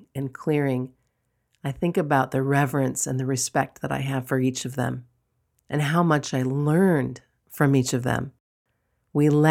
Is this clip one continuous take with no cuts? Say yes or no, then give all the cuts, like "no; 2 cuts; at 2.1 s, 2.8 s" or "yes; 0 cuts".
yes; 0 cuts